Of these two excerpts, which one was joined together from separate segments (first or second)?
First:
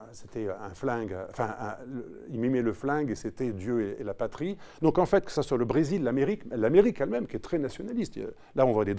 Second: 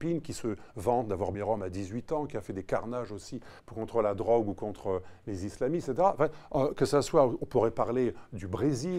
second